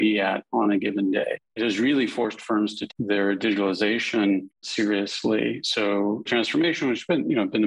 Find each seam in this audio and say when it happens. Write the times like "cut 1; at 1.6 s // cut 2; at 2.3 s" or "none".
cut 1; at 1.6 s // cut 2; at 2.9 s // cut 3; at 4.6 s // cut 4; at 6.3 s

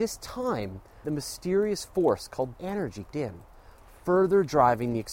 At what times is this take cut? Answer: cut 1; at 1.0 s // cut 2; at 2.5 s // cut 3; at 3.1 s

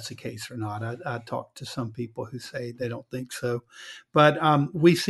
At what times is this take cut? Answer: none

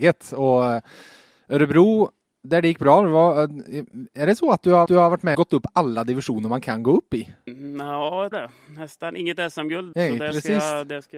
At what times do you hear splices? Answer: cut 1; at 4.9 s // cut 2; at 5.3 s // cut 3; at 8.3 s // cut 4; at 9.9 s

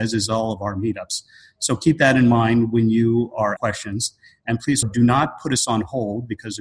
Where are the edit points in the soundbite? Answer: cut 1; at 3.6 s // cut 2; at 4.8 s

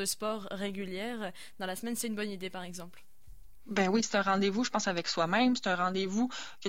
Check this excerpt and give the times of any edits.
none

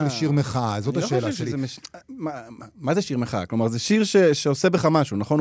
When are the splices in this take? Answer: none

